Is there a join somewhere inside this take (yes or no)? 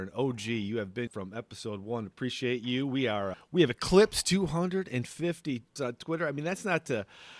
yes